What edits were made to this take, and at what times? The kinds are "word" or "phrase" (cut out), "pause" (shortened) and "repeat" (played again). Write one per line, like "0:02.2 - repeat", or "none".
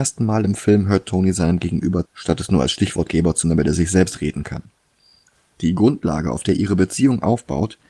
0:02.1 - word
0:03.4 - word
0:04.4 - word

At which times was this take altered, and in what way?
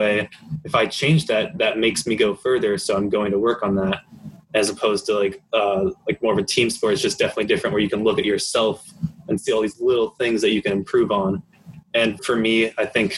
0:12.2 - word

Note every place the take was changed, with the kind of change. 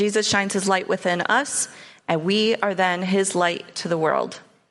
none

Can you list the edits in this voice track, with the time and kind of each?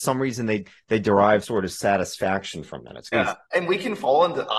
0:01.4 - word
0:03.1 - word
0:03.4 - pause

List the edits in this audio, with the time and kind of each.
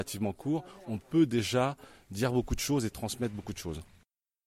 none

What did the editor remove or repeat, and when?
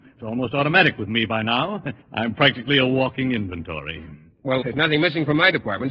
0:02.0 - pause
0:04.6 - word

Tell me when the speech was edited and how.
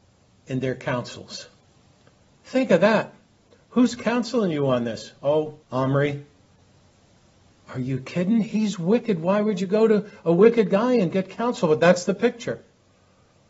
0:05.6 - pause

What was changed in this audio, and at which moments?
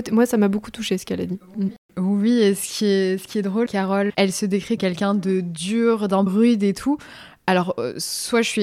0:03.7 - word
0:04.1 - word
0:04.8 - word
0:06.3 - word

